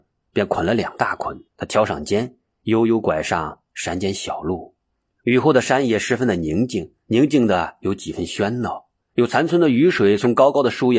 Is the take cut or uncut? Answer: cut